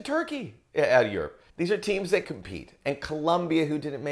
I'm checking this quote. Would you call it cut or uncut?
cut